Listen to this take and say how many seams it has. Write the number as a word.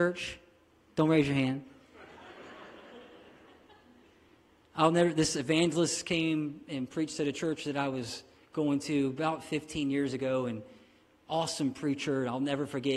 zero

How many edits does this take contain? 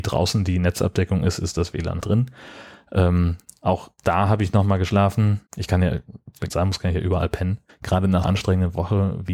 six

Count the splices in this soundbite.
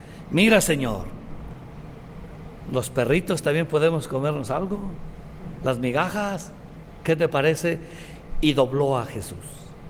zero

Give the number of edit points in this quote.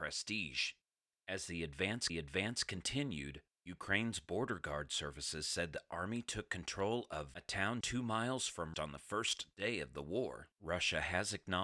five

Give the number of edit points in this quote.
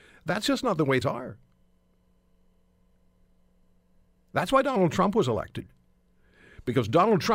one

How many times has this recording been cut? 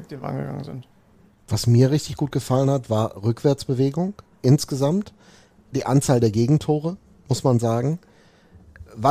zero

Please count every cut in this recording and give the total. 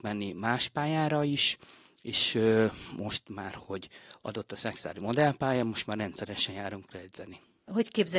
zero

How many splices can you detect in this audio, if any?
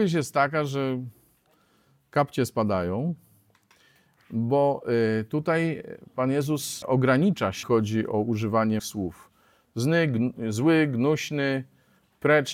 three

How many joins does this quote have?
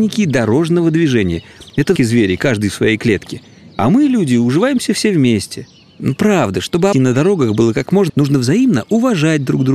three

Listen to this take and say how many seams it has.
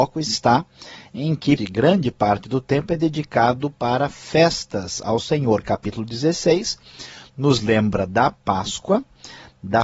one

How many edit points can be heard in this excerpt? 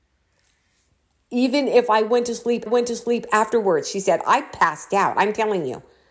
one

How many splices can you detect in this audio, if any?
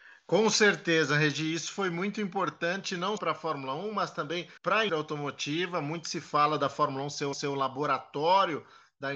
four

